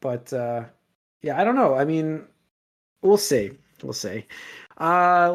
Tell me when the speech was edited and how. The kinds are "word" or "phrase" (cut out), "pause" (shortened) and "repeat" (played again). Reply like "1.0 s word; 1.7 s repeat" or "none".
none